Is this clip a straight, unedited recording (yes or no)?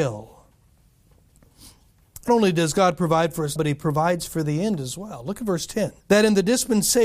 no